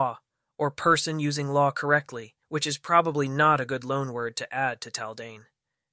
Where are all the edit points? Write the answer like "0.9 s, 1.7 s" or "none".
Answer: 2.4 s